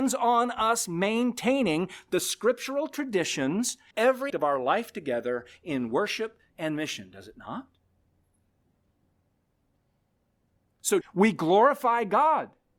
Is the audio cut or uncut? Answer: cut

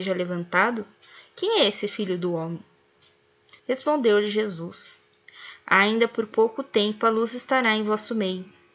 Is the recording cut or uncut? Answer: cut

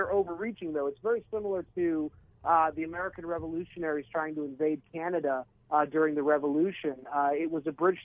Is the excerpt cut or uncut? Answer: uncut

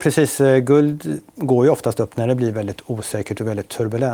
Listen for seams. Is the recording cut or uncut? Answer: uncut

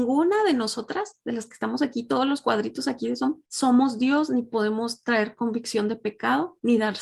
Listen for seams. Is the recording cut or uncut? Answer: uncut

